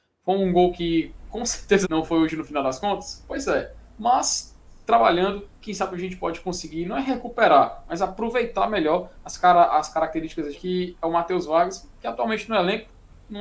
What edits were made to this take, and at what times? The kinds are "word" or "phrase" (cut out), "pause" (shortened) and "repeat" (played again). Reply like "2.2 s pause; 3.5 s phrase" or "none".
1.8 s word; 10.5 s word